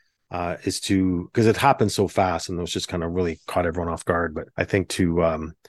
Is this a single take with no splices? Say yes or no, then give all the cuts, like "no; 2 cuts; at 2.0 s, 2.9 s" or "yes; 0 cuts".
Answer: no; 1 cut; at 4.5 s